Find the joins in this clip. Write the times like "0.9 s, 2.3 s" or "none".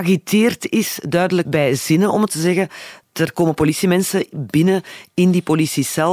1.4 s, 2.3 s